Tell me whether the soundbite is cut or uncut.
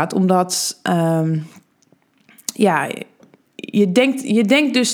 uncut